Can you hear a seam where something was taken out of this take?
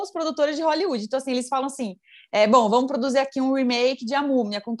no; 0 cuts

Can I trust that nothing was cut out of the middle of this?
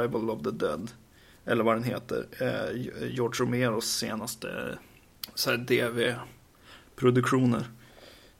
yes; 0 cuts

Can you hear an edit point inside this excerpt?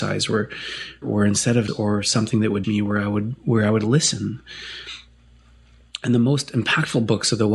yes; 3 cuts; at 1.0 s, 1.7 s, 2.6 s

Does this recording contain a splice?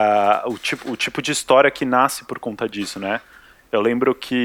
no; 0 cuts

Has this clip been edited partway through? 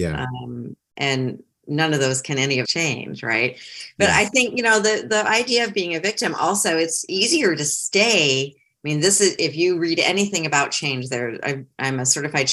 yes; 1 cut; at 2.6 s

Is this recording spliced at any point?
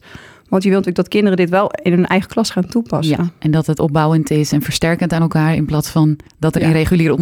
yes; 1 cut; at 6.3 s

